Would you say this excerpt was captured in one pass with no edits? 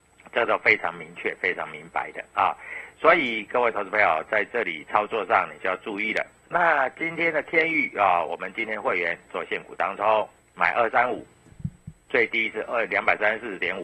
no; 2 cuts; at 6.5 s, 10.4 s

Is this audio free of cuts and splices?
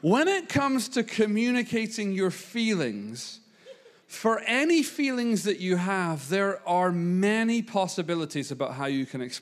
yes; 0 cuts

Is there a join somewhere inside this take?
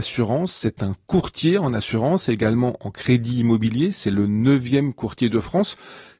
no; 0 cuts

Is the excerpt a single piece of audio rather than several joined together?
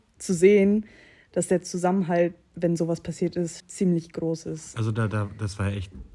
no; 1 cut; at 3.6 s

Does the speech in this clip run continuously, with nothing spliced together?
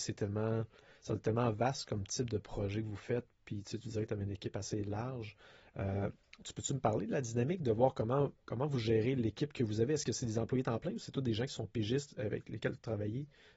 yes; 0 cuts

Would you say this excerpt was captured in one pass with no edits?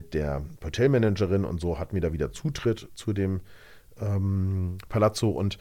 yes; 0 cuts

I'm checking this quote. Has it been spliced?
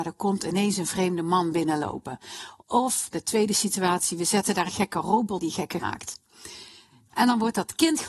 yes; 3 cuts; at 4.7 s, 5.4 s, 5.8 s

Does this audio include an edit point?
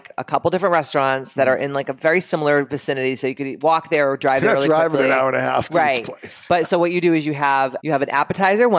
yes; 1 cut; at 7.8 s

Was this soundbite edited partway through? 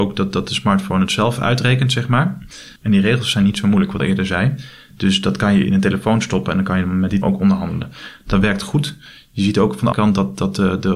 yes; 3 cuts; at 4.0 s, 7.2 s, 9.9 s

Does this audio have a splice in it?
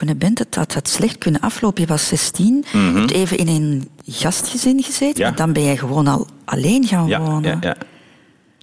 no; 0 cuts

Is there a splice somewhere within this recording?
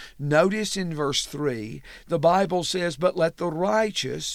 no; 0 cuts

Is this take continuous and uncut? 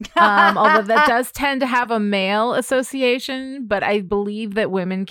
yes; 0 cuts

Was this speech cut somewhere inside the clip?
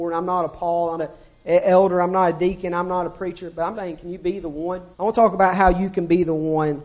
yes; 3 cuts; at 1.0 s, 3.7 s, 4.9 s

